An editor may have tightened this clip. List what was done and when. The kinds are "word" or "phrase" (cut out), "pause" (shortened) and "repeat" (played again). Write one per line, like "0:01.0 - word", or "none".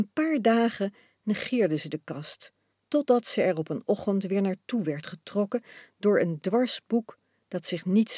0:02.7 - pause